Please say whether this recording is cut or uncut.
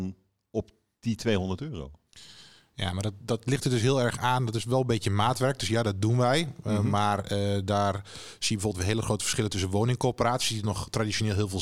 uncut